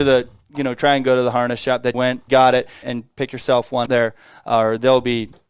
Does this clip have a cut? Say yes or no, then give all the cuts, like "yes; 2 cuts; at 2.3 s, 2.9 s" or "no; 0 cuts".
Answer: yes; 4 cuts; at 1.9 s, 2.3 s, 2.8 s, 3.9 s